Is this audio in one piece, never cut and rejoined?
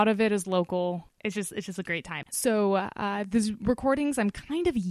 yes; 0 cuts

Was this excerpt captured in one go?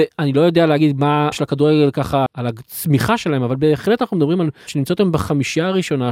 no; 3 cuts; at 1.3 s, 2.3 s, 4.7 s

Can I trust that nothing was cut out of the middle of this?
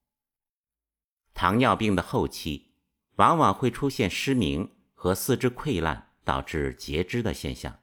yes; 0 cuts

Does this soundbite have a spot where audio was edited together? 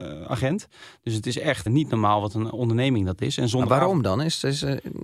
yes; 1 cut; at 1.7 s

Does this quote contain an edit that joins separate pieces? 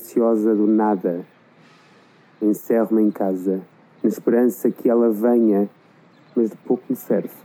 no; 0 cuts

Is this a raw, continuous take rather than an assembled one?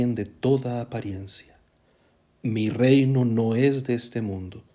yes; 0 cuts

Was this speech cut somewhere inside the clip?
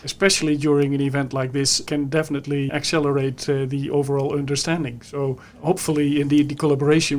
no; 0 cuts

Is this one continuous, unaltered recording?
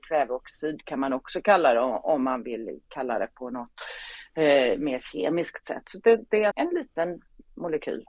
no; 1 cut; at 6.5 s

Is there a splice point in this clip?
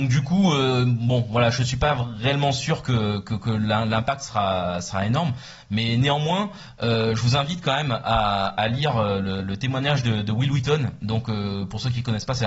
no; 0 cuts

